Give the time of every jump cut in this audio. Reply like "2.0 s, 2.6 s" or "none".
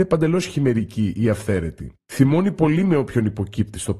none